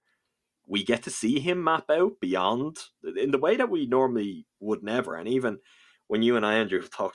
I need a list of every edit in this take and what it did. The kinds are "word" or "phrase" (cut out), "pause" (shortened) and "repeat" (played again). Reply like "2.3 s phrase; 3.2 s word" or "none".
none